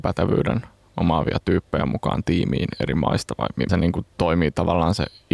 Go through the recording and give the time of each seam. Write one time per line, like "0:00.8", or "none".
0:03.7
0:04.1